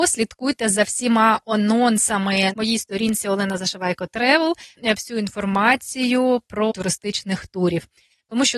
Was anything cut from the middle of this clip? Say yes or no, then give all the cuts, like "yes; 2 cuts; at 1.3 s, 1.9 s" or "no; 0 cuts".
yes; 3 cuts; at 2.5 s, 4.8 s, 6.7 s